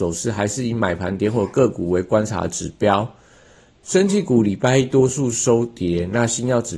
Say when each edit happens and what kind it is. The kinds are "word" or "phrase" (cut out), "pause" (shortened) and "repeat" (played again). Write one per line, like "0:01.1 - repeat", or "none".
none